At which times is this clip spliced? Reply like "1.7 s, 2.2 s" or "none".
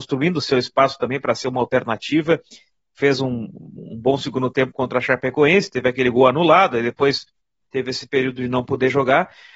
none